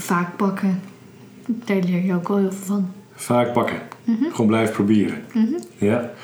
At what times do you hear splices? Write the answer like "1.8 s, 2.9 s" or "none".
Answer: 4.0 s